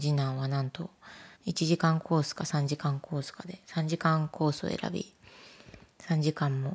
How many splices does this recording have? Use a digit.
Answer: 2